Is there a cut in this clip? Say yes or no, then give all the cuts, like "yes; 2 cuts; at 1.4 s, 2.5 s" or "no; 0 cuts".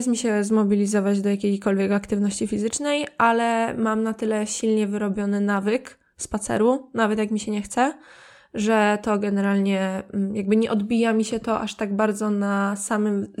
no; 0 cuts